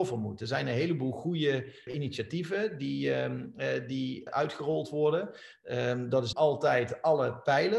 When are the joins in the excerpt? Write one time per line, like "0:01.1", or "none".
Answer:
0:01.9
0:04.3
0:06.3